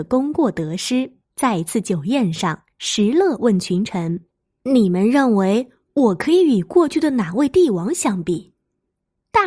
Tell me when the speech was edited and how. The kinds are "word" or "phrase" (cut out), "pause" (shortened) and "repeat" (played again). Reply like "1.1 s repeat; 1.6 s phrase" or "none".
1.2 s pause; 2.7 s pause; 4.3 s pause